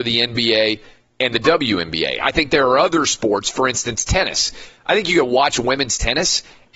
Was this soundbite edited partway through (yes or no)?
no